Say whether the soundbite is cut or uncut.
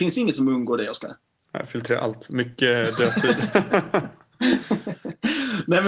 uncut